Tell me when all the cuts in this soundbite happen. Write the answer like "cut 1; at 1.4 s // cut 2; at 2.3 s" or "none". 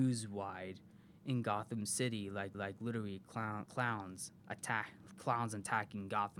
cut 1; at 2.5 s // cut 2; at 3.7 s // cut 3; at 4.4 s